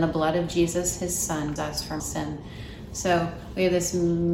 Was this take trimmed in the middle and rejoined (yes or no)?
yes